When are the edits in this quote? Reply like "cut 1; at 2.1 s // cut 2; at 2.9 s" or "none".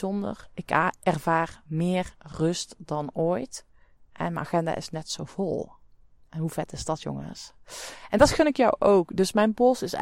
none